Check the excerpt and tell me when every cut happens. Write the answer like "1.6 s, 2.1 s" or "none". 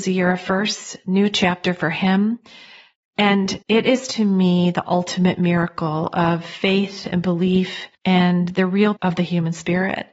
3.6 s, 7.9 s, 9.0 s